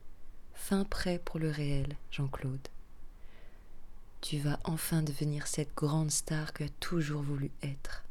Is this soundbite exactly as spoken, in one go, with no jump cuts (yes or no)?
no